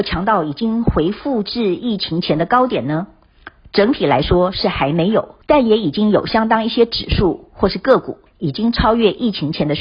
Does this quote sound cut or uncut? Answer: cut